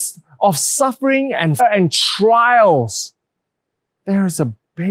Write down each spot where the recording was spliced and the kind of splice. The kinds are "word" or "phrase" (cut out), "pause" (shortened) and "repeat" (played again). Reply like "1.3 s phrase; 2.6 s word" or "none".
1.6 s word